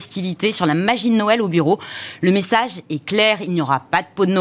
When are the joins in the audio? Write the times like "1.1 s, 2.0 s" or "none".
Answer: none